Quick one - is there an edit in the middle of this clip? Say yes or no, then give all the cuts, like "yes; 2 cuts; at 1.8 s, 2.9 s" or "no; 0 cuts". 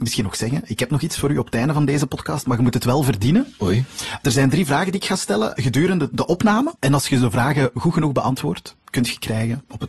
no; 0 cuts